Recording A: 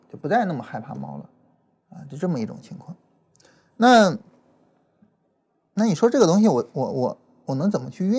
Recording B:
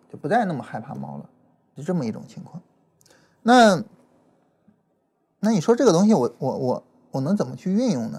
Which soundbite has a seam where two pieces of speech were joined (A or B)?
B